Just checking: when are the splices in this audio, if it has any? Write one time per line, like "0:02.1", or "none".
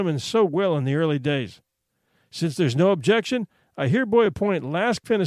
none